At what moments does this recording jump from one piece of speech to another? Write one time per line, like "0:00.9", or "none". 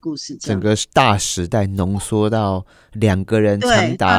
none